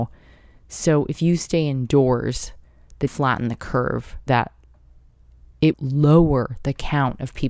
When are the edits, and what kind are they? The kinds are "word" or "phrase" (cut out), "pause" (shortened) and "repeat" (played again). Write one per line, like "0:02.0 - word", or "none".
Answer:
0:03.1 - word
0:04.3 - word
0:05.7 - word